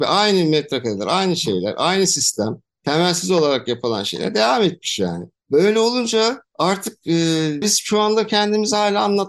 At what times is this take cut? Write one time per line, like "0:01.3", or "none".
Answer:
0:07.6